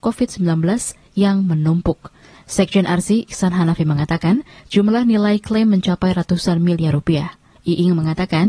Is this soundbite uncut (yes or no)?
no